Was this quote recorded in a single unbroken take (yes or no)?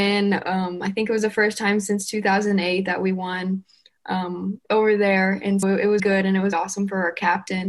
no